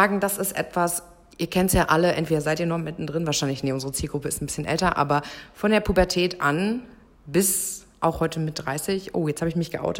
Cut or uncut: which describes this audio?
uncut